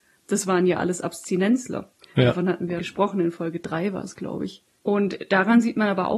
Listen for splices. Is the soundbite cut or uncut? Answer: cut